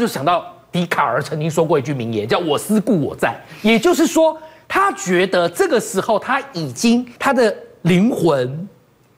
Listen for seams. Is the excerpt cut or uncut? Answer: cut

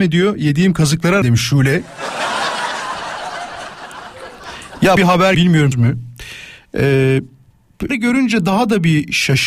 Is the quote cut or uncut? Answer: cut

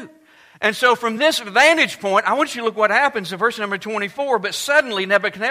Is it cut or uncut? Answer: uncut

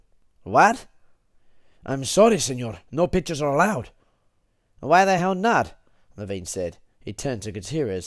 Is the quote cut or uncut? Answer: uncut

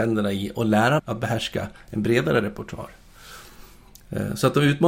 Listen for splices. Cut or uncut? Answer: cut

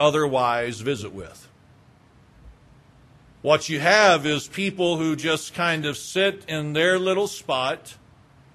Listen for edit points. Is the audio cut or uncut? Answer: uncut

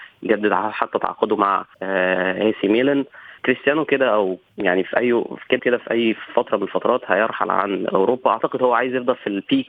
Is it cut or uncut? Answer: cut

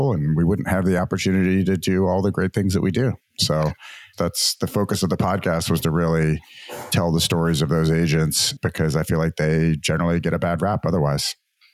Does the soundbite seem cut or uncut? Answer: uncut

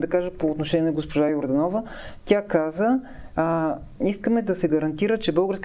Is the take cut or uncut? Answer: uncut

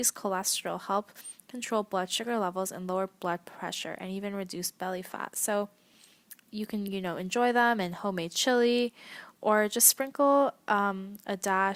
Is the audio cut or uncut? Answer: uncut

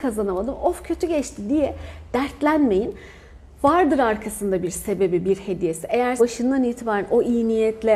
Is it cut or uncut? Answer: cut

